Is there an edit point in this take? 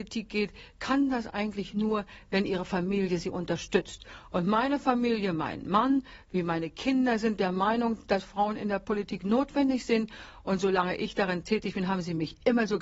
no; 0 cuts

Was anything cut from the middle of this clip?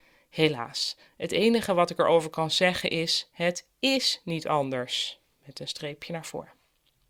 no; 0 cuts

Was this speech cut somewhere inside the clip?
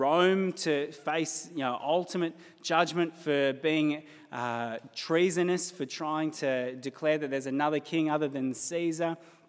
no; 0 cuts

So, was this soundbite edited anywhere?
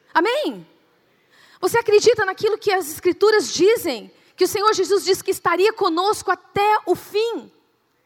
no; 0 cuts

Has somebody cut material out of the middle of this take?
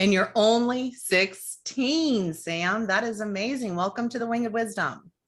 no; 0 cuts

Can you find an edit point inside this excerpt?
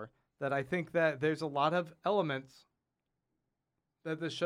no; 0 cuts

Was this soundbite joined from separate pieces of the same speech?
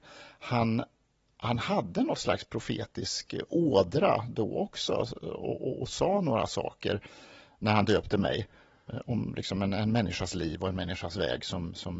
no; 0 cuts

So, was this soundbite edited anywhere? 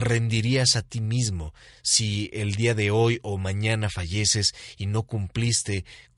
no; 0 cuts

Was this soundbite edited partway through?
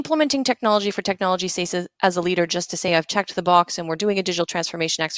no; 0 cuts

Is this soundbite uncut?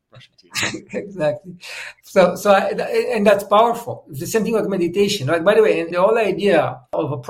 no; 1 cut; at 5.9 s

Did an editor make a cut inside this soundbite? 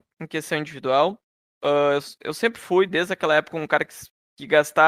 no; 0 cuts

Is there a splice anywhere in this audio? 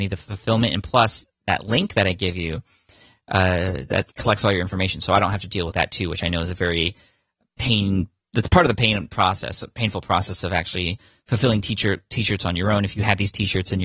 no; 0 cuts

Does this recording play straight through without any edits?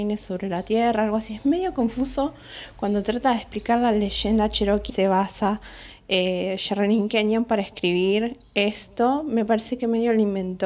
no; 1 cut; at 4.9 s

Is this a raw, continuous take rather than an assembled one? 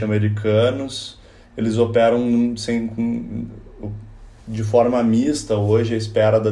yes; 0 cuts

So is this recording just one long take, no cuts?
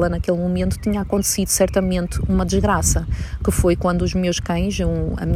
yes; 0 cuts

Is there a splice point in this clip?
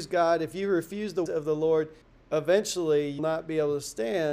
yes; 3 cuts; at 1.3 s, 2.0 s, 3.2 s

